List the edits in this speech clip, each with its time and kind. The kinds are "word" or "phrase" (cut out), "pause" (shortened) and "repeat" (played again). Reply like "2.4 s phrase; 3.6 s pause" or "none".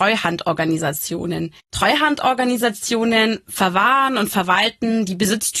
1.6 s pause